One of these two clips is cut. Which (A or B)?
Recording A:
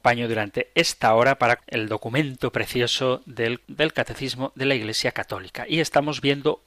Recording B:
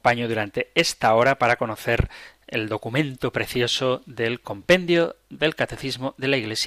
A